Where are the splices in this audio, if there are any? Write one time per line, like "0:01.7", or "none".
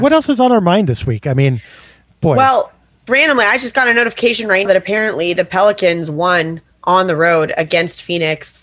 0:03.1
0:04.6